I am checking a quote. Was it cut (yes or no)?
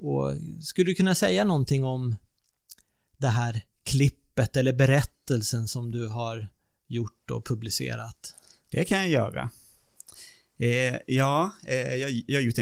no